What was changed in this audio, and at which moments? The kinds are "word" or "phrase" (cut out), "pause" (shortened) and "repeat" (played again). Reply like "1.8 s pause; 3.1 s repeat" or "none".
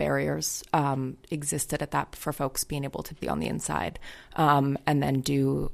1.2 s word; 2.1 s word; 3.2 s word